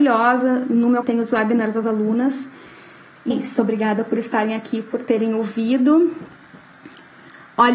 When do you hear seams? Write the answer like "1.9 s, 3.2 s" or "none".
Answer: 1.0 s, 3.3 s